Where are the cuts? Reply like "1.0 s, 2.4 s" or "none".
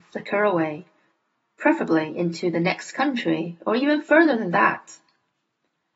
none